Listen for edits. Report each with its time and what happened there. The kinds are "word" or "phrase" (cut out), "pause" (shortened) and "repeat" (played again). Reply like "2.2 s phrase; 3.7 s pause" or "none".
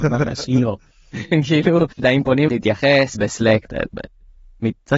1.9 s pause; 2.5 s word; 3.1 s word